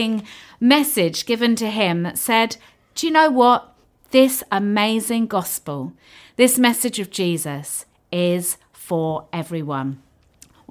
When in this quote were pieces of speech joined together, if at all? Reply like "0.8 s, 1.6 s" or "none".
none